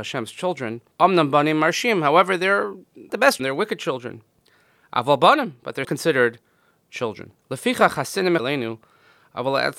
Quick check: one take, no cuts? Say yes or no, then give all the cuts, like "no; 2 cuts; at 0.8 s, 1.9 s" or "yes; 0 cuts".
no; 6 cuts; at 0.9 s, 3.1 s, 3.4 s, 5.8 s, 7.4 s, 8.4 s